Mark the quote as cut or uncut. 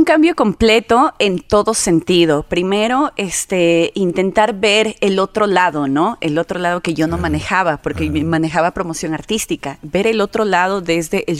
uncut